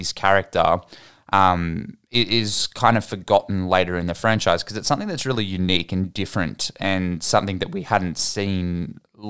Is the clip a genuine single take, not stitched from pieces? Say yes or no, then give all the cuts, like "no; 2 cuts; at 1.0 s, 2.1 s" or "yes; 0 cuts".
yes; 0 cuts